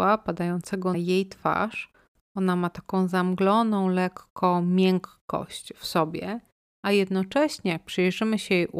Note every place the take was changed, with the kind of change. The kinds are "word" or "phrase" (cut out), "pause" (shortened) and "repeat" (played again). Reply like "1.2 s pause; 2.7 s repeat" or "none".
0.9 s word